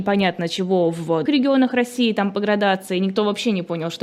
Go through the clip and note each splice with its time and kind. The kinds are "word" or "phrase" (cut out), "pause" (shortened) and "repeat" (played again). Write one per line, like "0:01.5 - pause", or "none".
0:01.3 - word